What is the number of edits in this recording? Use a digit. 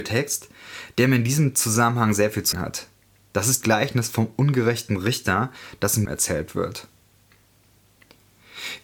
3